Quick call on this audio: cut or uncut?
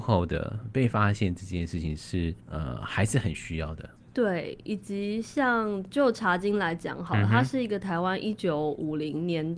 cut